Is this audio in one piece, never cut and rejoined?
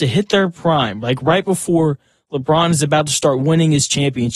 yes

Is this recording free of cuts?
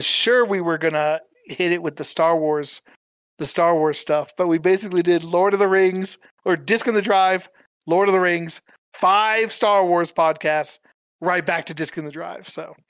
yes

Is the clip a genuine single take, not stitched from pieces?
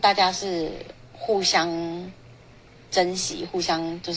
yes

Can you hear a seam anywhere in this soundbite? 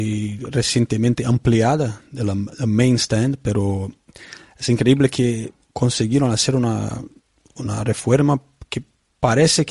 no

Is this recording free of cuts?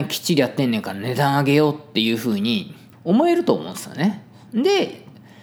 no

